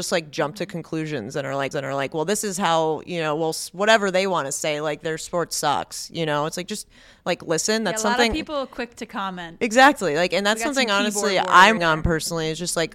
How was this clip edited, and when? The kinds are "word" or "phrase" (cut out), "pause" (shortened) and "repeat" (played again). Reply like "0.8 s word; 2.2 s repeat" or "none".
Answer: 1.7 s repeat; 11.8 s word